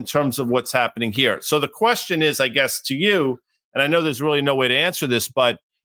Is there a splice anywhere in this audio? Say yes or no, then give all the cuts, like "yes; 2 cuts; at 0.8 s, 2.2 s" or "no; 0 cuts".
no; 0 cuts